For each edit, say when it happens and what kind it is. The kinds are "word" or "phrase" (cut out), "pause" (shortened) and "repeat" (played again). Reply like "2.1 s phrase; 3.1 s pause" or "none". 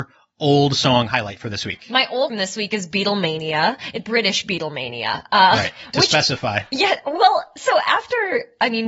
2.3 s phrase; 4.0 s word